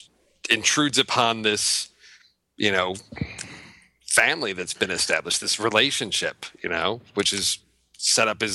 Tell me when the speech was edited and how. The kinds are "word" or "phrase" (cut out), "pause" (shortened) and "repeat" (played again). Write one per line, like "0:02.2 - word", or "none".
none